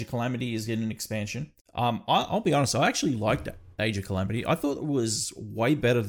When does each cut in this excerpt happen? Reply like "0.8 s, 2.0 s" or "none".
1.6 s